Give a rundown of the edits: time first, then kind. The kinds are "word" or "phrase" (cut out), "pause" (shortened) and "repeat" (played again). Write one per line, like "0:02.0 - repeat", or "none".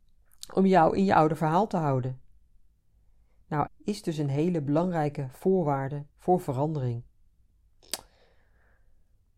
0:03.7 - phrase
0:06.1 - pause